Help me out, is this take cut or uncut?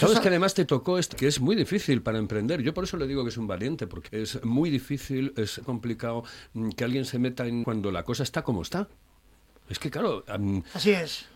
cut